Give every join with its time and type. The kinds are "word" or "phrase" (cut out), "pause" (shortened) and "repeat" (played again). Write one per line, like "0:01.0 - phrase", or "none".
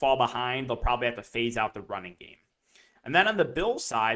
none